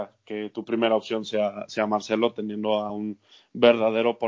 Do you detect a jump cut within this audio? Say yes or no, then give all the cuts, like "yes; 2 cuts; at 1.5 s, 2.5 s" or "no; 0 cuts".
no; 0 cuts